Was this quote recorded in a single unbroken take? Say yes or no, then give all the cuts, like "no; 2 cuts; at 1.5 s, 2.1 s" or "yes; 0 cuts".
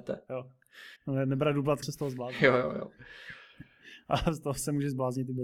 no; 2 cuts; at 1.0 s, 1.8 s